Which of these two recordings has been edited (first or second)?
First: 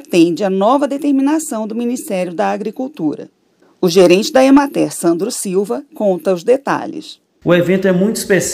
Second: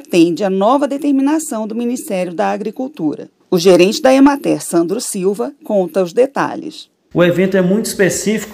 second